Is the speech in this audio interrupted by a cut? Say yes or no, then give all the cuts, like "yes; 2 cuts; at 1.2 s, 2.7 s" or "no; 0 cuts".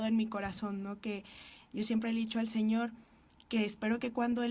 no; 0 cuts